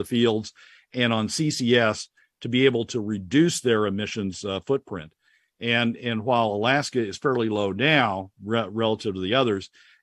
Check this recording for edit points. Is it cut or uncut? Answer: uncut